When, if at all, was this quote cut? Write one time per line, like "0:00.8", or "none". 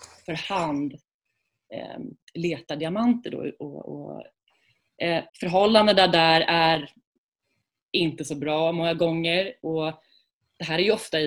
0:05.3